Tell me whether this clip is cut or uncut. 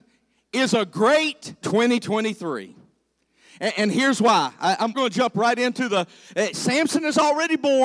cut